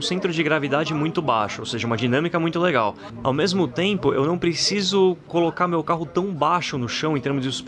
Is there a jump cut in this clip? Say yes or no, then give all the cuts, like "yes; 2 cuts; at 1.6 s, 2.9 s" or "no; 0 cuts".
no; 0 cuts